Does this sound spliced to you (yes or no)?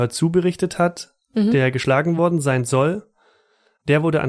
no